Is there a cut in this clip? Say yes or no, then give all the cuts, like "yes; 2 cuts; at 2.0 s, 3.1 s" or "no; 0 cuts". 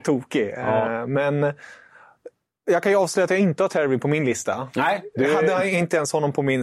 no; 0 cuts